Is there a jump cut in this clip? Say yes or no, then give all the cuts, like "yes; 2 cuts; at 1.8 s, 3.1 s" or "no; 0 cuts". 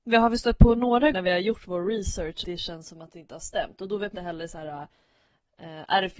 yes; 3 cuts; at 1.1 s, 2.4 s, 4.1 s